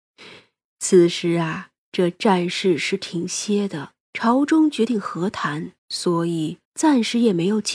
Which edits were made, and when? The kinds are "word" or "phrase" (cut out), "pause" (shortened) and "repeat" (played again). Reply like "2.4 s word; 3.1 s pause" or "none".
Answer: 4.0 s pause; 5.8 s pause; 6.6 s pause